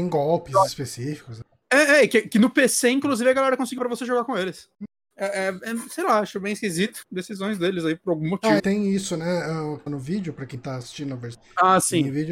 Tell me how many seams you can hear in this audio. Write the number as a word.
four